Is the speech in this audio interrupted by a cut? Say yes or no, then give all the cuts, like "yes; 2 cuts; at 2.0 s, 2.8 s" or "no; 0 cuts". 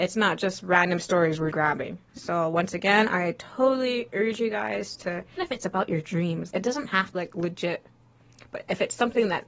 yes; 4 cuts; at 1.5 s, 5.4 s, 6.5 s, 7.1 s